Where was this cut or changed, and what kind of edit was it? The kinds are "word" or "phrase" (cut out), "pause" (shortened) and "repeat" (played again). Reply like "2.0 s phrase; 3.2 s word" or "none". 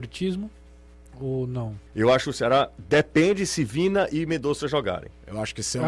1.9 s pause